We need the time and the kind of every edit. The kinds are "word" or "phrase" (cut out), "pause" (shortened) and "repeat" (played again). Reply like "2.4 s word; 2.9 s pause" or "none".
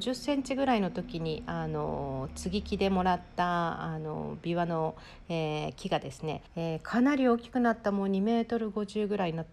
6.5 s pause